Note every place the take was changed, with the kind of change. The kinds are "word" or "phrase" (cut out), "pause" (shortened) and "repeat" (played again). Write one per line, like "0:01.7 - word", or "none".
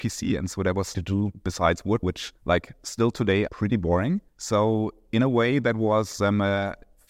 0:00.9 - phrase
0:02.0 - word
0:02.4 - pause
0:03.5 - phrase
0:04.3 - pause